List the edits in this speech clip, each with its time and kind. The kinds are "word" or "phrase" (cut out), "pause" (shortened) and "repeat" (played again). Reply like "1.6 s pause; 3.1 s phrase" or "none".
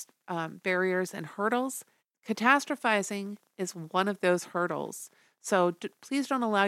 2.0 s pause